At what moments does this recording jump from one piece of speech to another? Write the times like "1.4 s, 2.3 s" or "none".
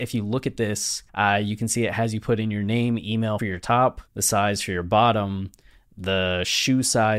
1.1 s, 3.4 s, 4.1 s